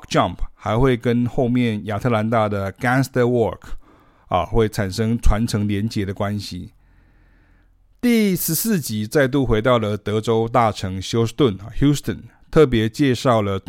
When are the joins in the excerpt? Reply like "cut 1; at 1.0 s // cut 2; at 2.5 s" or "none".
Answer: none